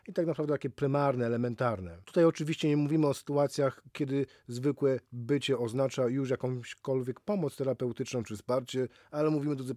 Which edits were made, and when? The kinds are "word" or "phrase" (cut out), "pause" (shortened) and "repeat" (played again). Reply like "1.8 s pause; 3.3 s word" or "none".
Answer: none